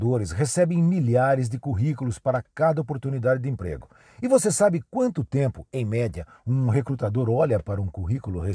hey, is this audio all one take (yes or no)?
yes